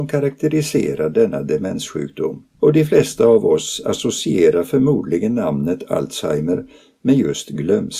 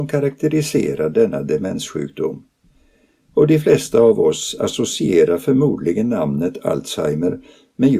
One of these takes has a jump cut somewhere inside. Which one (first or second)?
first